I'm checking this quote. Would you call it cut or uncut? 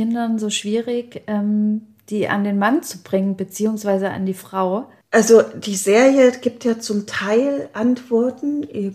uncut